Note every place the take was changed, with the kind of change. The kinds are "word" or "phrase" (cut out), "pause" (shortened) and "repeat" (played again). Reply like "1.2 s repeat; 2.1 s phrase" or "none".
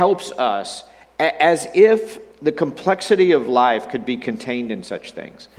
2.3 s pause